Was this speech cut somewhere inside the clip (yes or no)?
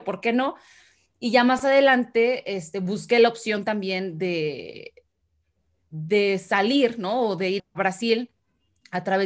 yes